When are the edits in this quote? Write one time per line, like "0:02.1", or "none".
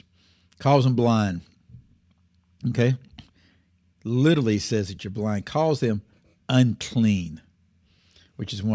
none